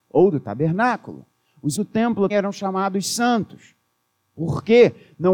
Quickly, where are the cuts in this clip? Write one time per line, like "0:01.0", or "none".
0:01.8
0:02.3

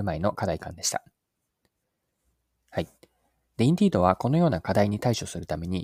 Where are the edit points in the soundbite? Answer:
none

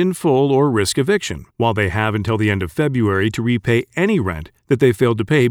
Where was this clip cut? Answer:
0:01.5

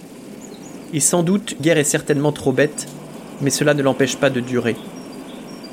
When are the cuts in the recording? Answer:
0:01.6

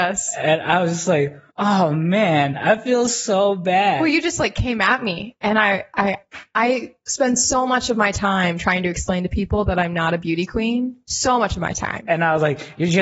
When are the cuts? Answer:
0:01.5

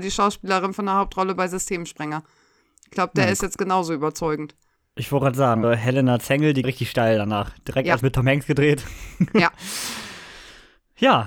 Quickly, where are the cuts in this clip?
0:04.8
0:05.6
0:06.6
0:08.0

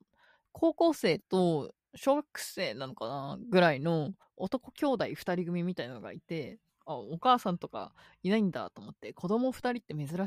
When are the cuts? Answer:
0:02.3
0:04.2
0:06.7

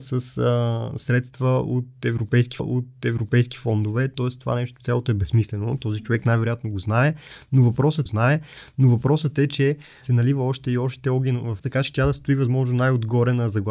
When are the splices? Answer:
0:02.6
0:08.1
0:11.6

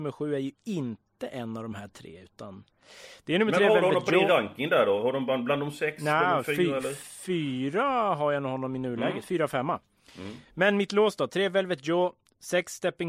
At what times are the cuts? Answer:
none

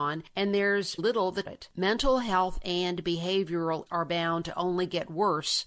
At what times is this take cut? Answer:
0:01.0
0:01.4
0:03.9

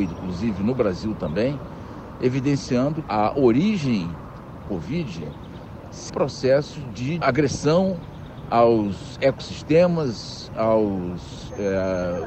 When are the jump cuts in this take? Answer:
0:03.0
0:04.6
0:06.1
0:07.2

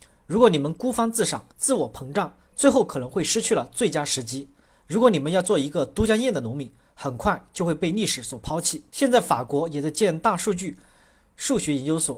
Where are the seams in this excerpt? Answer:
0:01.5
0:08.9

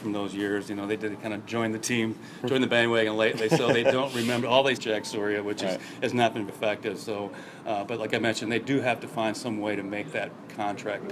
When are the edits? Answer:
0:04.8
0:06.5

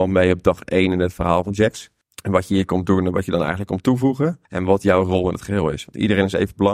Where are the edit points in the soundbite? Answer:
0:04.5

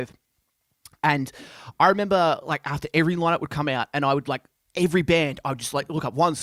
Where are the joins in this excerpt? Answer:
none

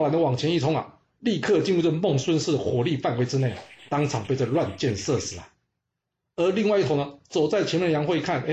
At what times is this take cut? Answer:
none

